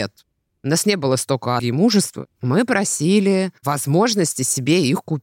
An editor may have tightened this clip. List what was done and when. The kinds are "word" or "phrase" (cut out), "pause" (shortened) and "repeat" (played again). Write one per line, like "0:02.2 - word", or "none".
0:01.6 - word
0:03.6 - pause